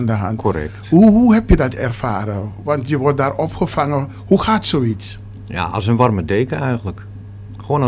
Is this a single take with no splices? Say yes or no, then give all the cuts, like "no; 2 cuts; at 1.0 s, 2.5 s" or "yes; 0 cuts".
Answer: yes; 0 cuts